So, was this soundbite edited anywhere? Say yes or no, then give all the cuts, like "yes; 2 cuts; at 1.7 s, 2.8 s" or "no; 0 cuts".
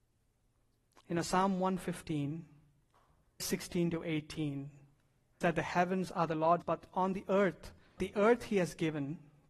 yes; 4 cuts; at 3.4 s, 5.4 s, 6.6 s, 8.0 s